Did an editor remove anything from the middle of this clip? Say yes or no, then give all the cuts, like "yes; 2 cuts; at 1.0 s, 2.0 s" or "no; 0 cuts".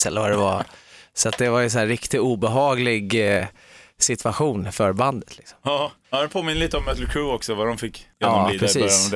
no; 0 cuts